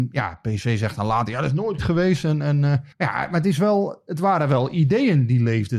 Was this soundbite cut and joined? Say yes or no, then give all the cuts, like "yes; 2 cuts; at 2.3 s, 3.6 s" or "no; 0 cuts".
yes; 2 cuts; at 1.8 s, 2.9 s